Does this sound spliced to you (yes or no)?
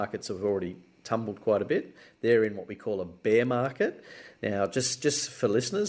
no